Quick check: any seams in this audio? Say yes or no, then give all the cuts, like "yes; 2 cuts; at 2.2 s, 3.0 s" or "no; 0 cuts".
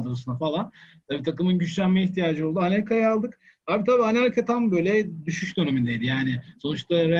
no; 0 cuts